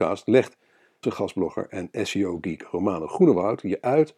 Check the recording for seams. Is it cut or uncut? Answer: cut